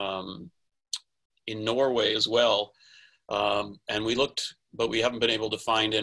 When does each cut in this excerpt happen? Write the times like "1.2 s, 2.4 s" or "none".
1.3 s

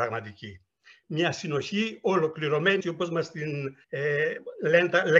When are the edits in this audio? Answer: 2.8 s, 3.8 s

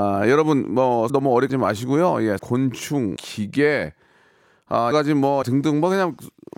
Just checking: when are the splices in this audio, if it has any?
1.1 s, 1.5 s, 2.4 s, 3.2 s, 4.9 s, 5.4 s

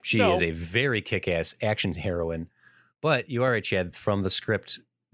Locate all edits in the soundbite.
none

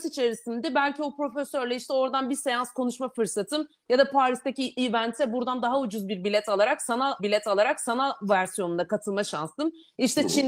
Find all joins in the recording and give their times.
7.2 s

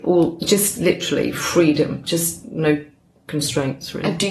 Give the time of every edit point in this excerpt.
none

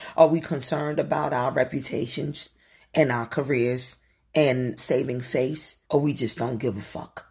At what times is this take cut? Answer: 4.8 s, 5.8 s

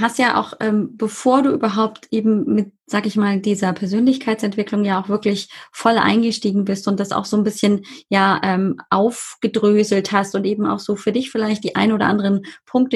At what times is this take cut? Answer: none

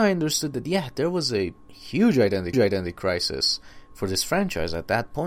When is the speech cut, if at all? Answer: 2.5 s

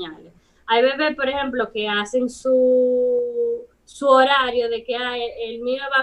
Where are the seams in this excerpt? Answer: 3.7 s

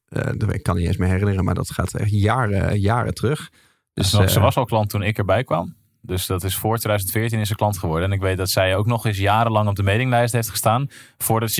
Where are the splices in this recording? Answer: none

